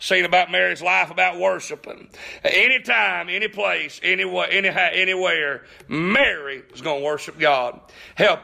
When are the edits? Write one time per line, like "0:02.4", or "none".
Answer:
none